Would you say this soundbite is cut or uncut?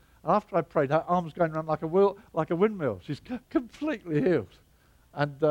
cut